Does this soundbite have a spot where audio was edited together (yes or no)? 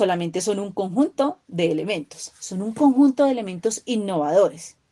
no